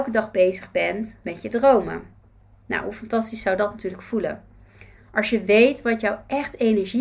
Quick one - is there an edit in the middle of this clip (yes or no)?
no